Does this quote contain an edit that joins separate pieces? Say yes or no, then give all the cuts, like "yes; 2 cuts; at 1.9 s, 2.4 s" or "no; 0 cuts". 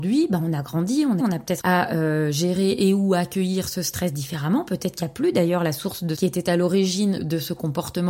yes; 4 cuts; at 1.2 s, 1.6 s, 6.2 s, 7.2 s